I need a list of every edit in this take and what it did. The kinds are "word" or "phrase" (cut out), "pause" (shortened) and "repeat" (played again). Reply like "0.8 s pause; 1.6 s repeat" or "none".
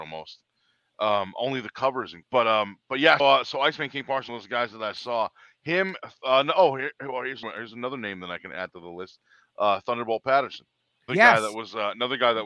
2.2 s word; 3.2 s word; 4.3 s word; 7.4 s word; 11.1 s word

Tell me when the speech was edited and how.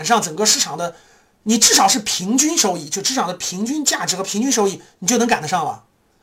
none

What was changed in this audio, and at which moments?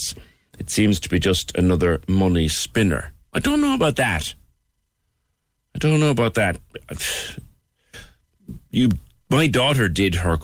8.6 s pause

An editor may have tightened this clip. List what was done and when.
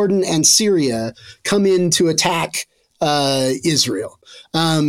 none

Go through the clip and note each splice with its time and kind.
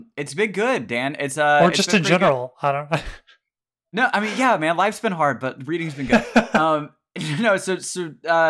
none

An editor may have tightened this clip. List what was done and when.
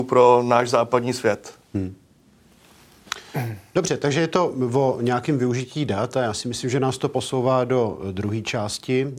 none

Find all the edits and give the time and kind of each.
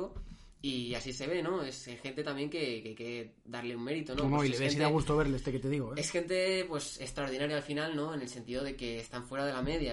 none

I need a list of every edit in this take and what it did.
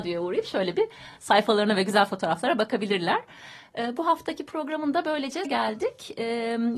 5.4 s word

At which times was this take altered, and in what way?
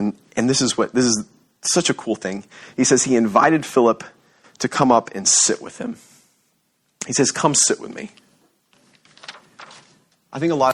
none

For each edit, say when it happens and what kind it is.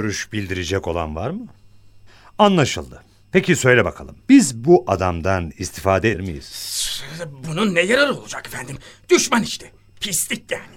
4.2 s pause; 6.1 s word

